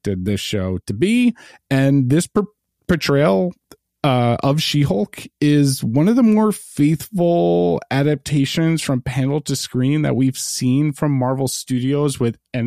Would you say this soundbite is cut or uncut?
uncut